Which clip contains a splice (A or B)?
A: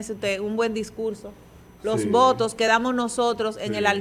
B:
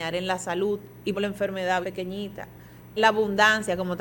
B